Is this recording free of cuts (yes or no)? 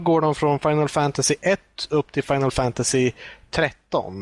yes